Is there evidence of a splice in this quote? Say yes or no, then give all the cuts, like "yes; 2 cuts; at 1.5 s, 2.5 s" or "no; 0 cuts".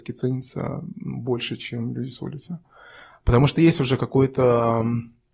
no; 0 cuts